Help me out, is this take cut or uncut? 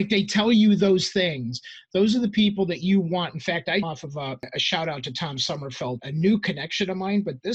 cut